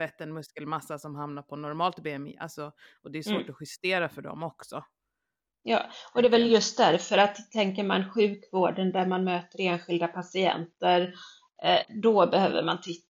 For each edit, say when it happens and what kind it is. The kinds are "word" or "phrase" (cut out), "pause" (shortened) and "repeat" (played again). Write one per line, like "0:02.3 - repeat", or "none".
none